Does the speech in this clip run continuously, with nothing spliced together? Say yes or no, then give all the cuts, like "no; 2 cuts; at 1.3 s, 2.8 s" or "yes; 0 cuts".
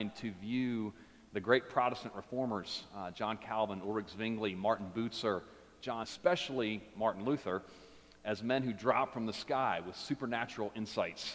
no; 1 cut; at 6.0 s